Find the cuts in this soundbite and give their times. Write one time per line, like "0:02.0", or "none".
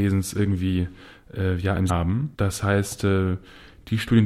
0:01.9
0:02.3